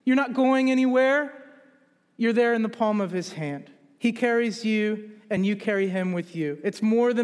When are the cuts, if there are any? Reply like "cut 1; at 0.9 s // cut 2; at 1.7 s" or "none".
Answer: none